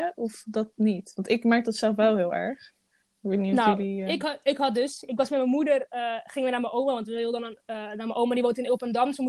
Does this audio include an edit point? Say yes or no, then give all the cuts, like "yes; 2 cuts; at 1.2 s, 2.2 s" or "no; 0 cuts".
no; 0 cuts